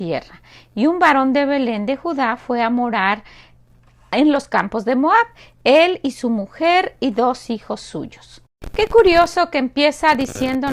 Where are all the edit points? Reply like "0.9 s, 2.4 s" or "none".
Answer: none